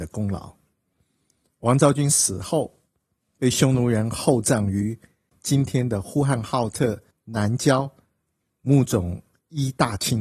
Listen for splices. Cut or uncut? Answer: uncut